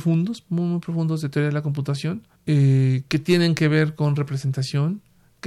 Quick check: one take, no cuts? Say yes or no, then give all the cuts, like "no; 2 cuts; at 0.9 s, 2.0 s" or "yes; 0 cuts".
no; 1 cut; at 2.3 s